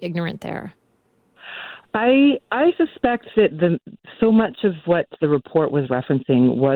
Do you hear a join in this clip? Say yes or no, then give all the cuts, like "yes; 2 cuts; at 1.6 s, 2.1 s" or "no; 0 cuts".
no; 0 cuts